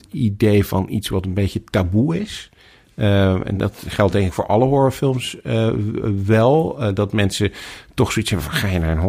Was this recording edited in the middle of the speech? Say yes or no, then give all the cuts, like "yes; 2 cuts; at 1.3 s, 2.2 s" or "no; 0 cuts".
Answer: no; 0 cuts